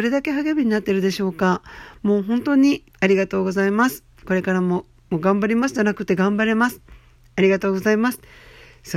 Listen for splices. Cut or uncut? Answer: cut